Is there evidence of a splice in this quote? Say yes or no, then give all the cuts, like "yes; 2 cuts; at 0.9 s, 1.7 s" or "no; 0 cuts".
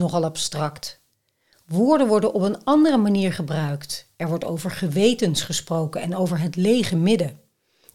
no; 0 cuts